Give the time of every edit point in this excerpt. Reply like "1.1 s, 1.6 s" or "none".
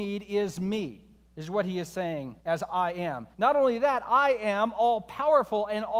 1.2 s, 2.4 s, 3.3 s

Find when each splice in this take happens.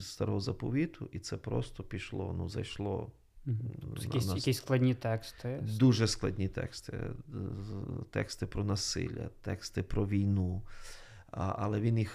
none

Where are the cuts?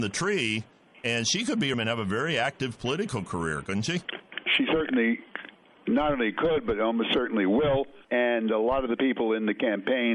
1.7 s, 8.0 s

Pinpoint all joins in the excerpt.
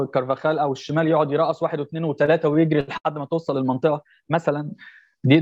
none

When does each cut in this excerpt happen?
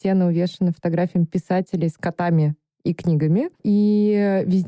3.5 s

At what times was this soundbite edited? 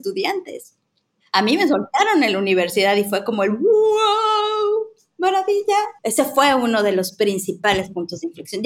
6.0 s

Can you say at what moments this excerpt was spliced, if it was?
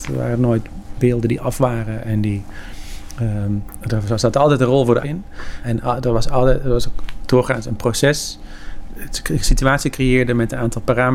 5.0 s

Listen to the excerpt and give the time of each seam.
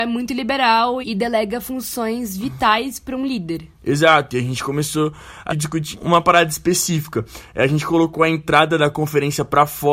1.0 s, 5.5 s, 5.9 s

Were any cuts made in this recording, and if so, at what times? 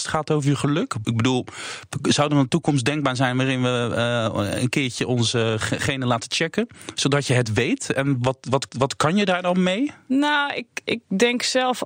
8.7 s

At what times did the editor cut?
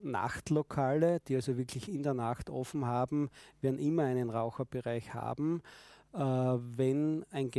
none

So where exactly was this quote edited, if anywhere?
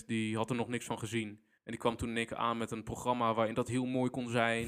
1.6 s

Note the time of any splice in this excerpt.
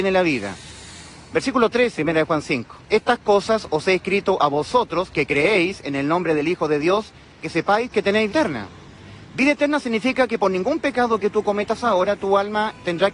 2.0 s, 2.8 s, 7.4 s, 8.3 s

